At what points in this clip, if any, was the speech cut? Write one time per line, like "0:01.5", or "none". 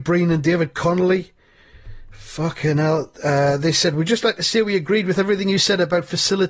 none